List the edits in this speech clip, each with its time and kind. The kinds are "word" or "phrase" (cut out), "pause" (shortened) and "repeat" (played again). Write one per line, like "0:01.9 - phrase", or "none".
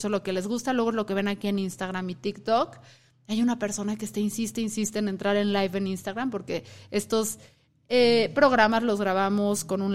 none

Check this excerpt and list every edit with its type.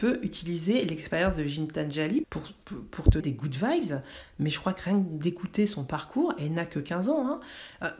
0:02.2 - word
0:03.2 - word

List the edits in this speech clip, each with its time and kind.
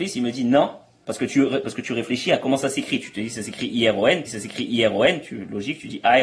0:04.3 - repeat

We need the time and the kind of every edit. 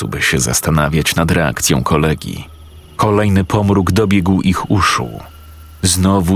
0:02.9 - pause

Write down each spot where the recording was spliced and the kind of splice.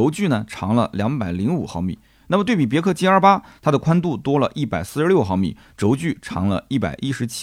none

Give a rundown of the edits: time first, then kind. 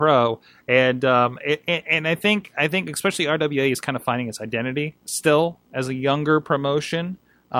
0:05.0 - pause

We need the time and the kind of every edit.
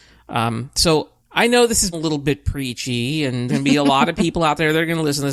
0:01.2 - word
0:01.9 - word
0:03.5 - word

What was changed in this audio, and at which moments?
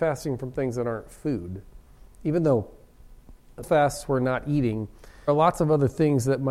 0:03.6 - word
0:05.3 - word

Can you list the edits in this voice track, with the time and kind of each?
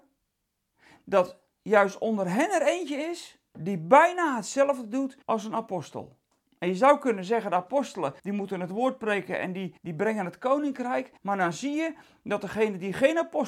0:03.5 - pause
0:05.2 - pause
0:06.3 - pause
0:08.2 - pause
0:09.8 - pause
0:11.2 - pause

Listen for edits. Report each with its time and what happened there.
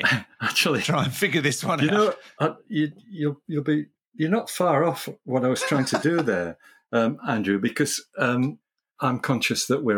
none

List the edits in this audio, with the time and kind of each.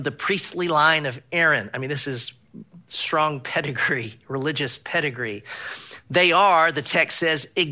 none

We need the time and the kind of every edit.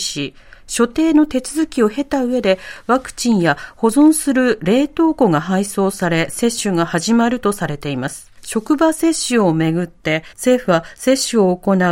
0:08.4 - pause
0:10.3 - pause

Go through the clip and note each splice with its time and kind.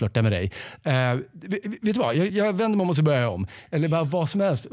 0:02.3 - word

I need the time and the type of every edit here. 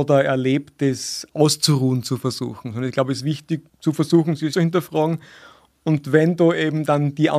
0:03.7 - pause
0:04.5 - phrase

